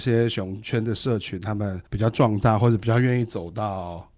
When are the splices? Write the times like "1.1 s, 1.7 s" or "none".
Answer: 1.9 s